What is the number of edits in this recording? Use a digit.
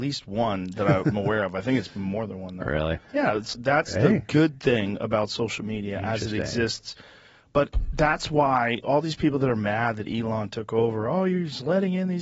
3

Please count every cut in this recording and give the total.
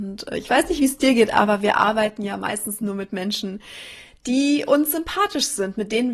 0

